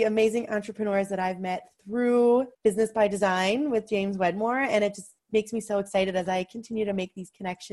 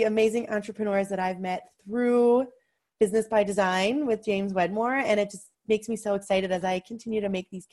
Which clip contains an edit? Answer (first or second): first